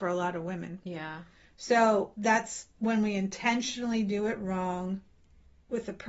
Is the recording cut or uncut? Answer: uncut